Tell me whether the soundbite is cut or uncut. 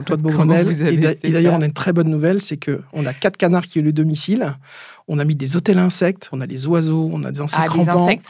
cut